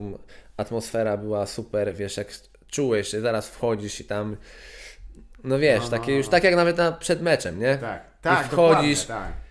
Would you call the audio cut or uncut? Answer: uncut